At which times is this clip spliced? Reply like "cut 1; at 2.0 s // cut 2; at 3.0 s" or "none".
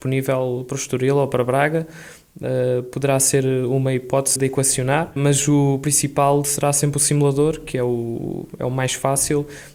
cut 1; at 4.4 s // cut 2; at 5.2 s